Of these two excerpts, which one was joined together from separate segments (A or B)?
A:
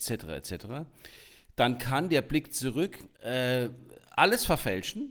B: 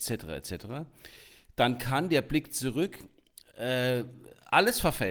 A